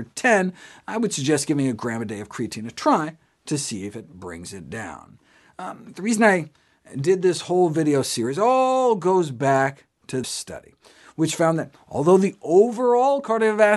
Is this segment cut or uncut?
cut